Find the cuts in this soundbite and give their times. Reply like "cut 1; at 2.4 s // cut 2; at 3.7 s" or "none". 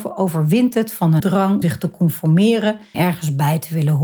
cut 1; at 1.2 s // cut 2; at 1.6 s // cut 3; at 2.9 s

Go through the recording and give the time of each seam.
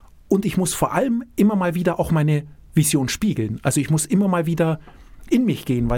none

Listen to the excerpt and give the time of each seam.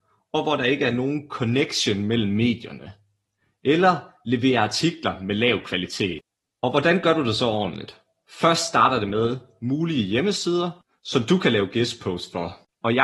none

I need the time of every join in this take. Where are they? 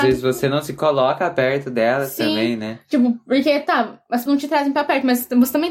cut 1; at 4.3 s

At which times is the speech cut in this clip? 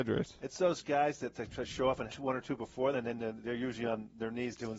cut 1; at 2.1 s // cut 2; at 2.9 s

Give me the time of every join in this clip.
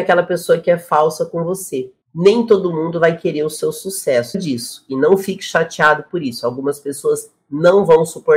cut 1; at 2.0 s // cut 2; at 4.3 s

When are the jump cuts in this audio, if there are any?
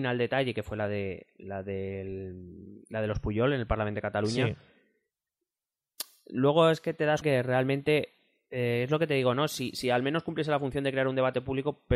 cut 1; at 7.2 s

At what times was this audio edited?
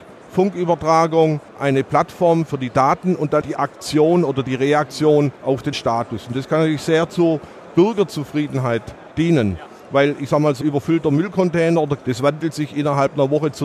cut 1; at 1.5 s // cut 2; at 3.4 s // cut 3; at 5.4 s // cut 4; at 5.7 s // cut 5; at 9.1 s // cut 6; at 10.6 s // cut 7; at 12.0 s

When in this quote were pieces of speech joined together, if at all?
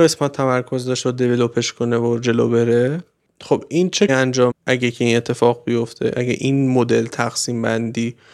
cut 1; at 1.0 s // cut 2; at 4.1 s // cut 3; at 4.5 s

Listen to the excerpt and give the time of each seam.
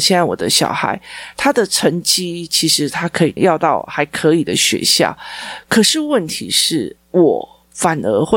cut 1; at 3.4 s

